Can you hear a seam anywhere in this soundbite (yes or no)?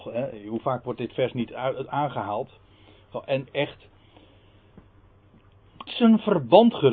yes